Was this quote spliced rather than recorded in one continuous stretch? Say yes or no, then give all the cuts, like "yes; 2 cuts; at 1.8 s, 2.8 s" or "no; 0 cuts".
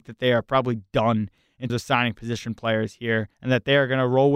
yes; 2 cuts; at 1.7 s, 3.3 s